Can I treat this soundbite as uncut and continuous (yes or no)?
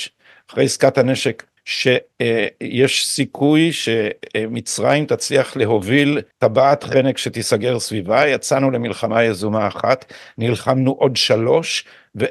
no